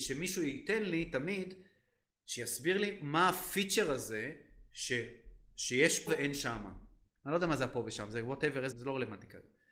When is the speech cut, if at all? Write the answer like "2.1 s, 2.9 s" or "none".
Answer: 4.7 s, 6.1 s, 8.7 s